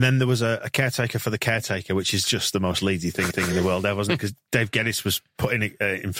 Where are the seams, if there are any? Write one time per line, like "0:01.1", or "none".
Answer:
0:03.3